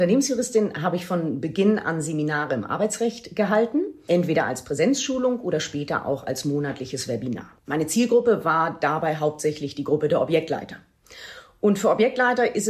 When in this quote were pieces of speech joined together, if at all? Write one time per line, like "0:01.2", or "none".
0:07.6